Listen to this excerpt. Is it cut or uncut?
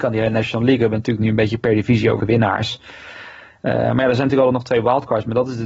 cut